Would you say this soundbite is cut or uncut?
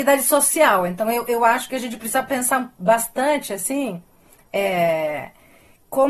uncut